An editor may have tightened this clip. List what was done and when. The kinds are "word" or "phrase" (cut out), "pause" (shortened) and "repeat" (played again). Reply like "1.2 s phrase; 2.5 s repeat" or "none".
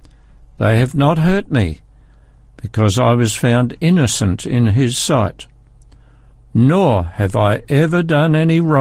none